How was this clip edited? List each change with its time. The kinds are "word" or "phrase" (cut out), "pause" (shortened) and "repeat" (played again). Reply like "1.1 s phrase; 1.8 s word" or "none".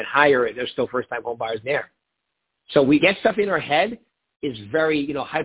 1.6 s word; 3.0 s word; 4.3 s word